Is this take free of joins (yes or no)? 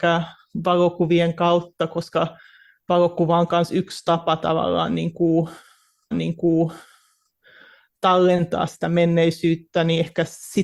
no